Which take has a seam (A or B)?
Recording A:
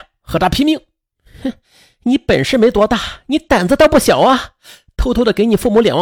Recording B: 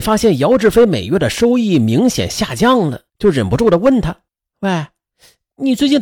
B